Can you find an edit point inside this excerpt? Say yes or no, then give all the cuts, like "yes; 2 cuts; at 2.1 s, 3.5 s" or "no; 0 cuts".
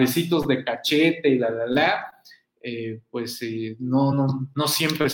yes; 1 cut; at 4.1 s